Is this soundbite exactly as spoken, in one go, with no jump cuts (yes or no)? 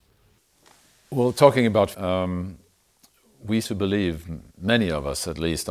no